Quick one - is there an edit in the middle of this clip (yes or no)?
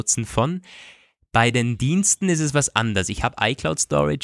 no